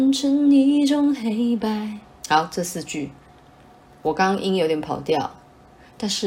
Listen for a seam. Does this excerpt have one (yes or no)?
yes